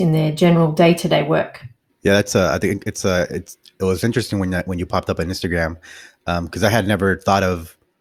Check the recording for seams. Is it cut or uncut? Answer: uncut